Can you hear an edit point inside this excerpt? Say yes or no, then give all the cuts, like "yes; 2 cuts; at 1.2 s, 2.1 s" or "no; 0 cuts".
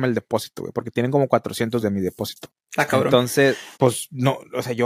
yes; 2 cuts; at 1.8 s, 3.7 s